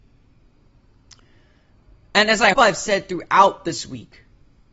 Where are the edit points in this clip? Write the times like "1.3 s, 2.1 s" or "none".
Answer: 2.5 s